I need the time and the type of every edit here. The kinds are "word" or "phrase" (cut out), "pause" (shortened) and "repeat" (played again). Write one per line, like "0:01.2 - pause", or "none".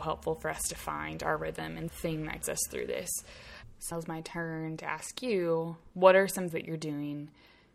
0:01.9 - phrase
0:02.4 - word
0:03.9 - word
0:05.9 - pause
0:06.5 - word